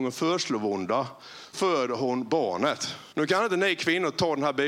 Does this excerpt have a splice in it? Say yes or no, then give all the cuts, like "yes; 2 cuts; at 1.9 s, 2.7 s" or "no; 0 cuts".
yes; 2 cuts; at 1.5 s, 3.1 s